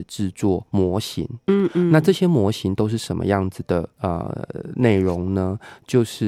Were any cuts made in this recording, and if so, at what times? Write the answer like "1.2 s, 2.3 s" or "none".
3.9 s

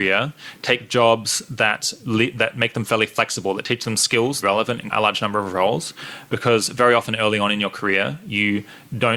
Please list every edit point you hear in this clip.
4.4 s, 4.9 s

